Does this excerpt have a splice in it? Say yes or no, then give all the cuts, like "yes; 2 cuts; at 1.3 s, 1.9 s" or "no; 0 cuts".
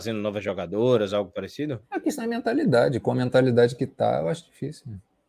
yes; 1 cut; at 1.8 s